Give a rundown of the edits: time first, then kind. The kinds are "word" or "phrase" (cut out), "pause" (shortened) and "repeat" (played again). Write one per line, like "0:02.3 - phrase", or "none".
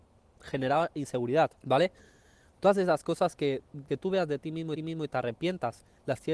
0:01.6 - pause
0:03.9 - phrase
0:04.8 - repeat